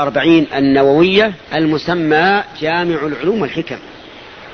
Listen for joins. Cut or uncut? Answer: cut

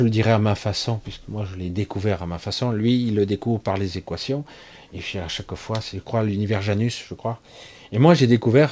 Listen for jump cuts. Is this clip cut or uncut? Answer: uncut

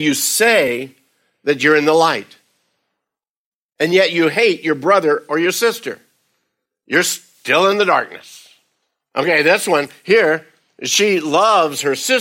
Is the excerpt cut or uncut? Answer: uncut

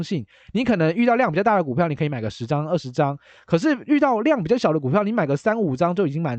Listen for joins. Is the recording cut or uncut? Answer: uncut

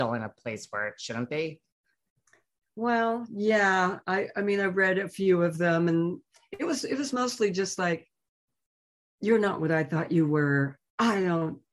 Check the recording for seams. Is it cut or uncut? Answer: uncut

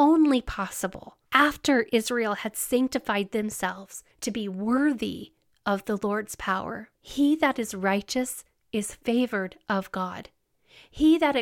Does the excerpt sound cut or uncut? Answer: cut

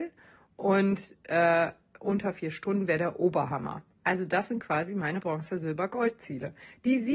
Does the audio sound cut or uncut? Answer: uncut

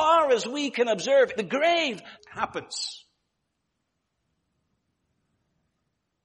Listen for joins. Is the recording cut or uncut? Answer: cut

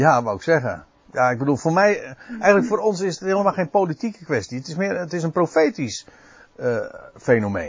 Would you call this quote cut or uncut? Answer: uncut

